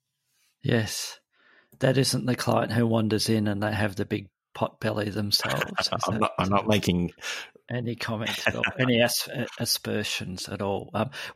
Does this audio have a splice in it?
no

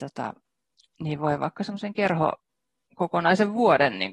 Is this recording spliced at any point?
no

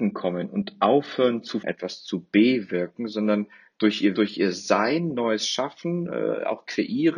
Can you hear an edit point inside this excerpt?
yes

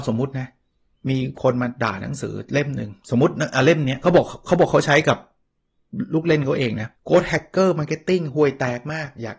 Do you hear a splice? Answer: yes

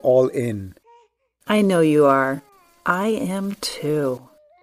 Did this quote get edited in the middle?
no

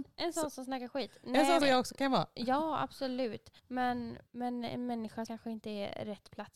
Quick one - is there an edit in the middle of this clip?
yes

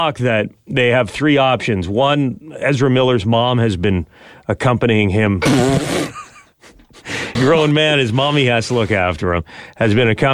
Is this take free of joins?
no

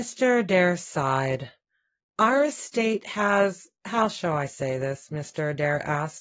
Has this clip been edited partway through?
no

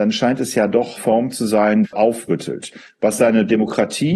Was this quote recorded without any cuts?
no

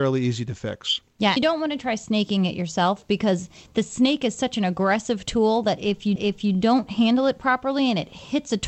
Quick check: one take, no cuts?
no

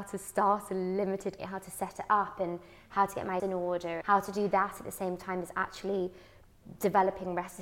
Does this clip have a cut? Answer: yes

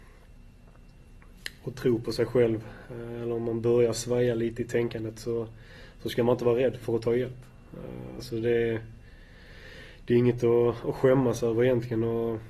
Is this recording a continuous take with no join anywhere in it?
no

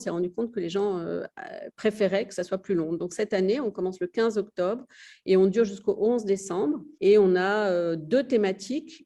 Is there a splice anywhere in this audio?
yes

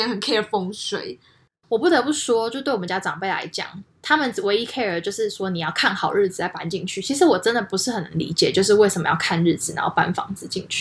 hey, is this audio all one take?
yes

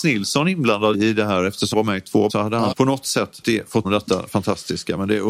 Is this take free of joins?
no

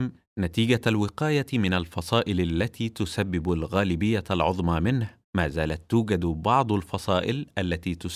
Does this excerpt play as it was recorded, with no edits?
no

